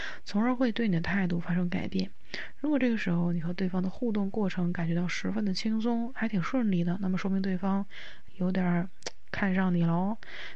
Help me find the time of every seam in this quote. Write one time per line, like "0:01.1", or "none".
0:08.3

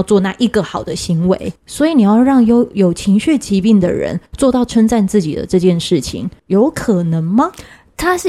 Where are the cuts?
0:01.6
0:04.3
0:06.4

